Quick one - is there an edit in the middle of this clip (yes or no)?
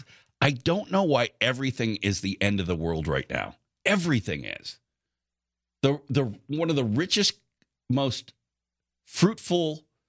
no